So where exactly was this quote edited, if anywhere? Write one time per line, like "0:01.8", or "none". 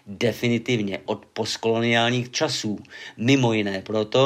0:01.1